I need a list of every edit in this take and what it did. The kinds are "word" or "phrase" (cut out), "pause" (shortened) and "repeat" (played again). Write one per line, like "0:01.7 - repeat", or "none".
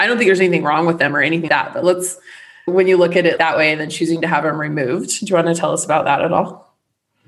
0:01.5 - word
0:03.4 - word

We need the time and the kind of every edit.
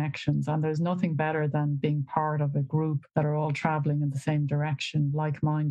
0:03.1 - pause

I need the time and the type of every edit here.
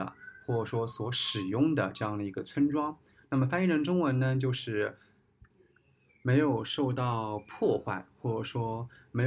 none

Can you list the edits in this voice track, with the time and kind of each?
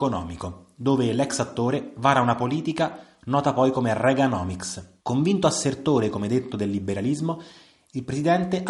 0:05.0 - pause

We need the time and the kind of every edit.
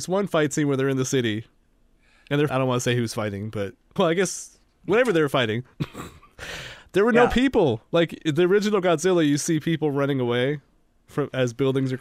0:02.5 - word
0:04.0 - word

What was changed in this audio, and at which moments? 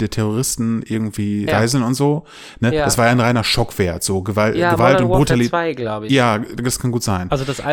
0:01.5 - word

